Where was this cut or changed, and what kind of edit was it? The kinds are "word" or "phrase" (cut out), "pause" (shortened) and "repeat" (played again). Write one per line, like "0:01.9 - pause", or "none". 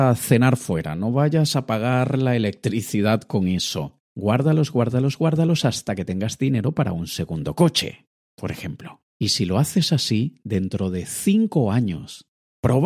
0:04.1 - pause
0:09.1 - pause